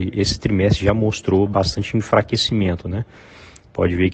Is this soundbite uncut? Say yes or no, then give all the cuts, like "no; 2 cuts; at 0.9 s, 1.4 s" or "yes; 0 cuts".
yes; 0 cuts